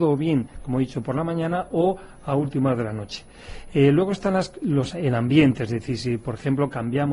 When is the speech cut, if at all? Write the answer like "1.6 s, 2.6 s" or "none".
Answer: none